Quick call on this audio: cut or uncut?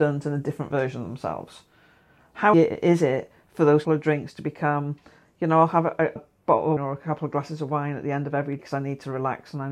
cut